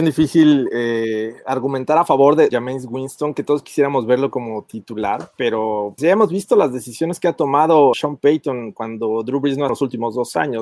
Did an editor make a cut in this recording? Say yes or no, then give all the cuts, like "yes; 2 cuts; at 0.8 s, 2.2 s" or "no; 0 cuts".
yes; 4 cuts; at 2.5 s, 6.0 s, 7.9 s, 9.7 s